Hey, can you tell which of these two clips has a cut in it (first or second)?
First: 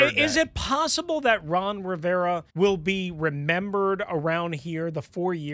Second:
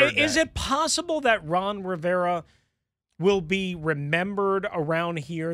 first